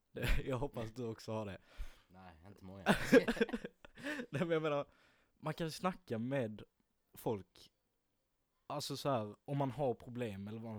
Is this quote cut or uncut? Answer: uncut